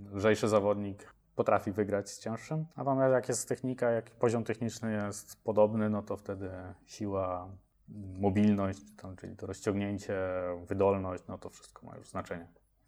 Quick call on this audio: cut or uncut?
cut